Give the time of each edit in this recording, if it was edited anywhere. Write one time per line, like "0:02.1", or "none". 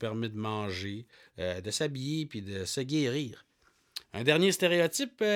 0:01.1
0:04.0